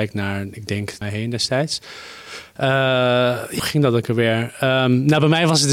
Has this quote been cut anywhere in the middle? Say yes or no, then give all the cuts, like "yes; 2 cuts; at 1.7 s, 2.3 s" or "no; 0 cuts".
yes; 2 cuts; at 1.0 s, 3.6 s